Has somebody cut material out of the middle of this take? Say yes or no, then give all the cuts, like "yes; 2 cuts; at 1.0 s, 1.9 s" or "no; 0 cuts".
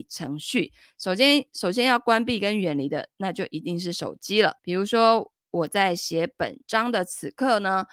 yes; 1 cut; at 4.6 s